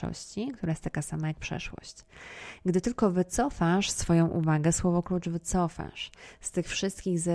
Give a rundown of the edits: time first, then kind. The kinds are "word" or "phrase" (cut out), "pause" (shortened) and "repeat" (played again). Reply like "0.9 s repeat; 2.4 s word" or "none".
none